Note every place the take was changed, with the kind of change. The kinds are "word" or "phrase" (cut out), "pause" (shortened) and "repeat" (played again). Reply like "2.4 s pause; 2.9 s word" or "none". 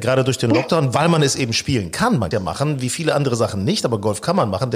2.3 s phrase